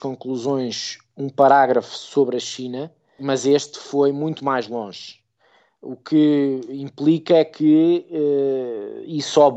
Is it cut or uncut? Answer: uncut